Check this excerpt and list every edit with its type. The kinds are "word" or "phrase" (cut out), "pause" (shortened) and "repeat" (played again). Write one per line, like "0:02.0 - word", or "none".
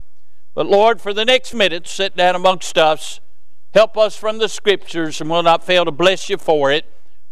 0:01.5 - word